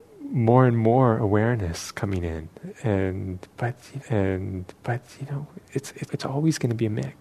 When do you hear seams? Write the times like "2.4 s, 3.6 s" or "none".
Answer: 4.0 s, 6.1 s